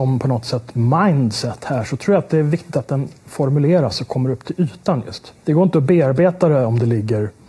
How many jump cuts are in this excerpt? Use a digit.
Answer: 1